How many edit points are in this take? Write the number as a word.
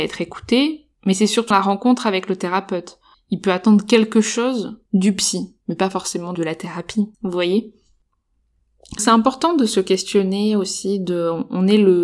eight